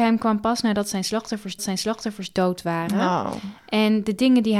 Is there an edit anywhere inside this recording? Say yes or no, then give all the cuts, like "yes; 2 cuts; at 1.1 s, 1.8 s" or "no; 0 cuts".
yes; 1 cut; at 1.6 s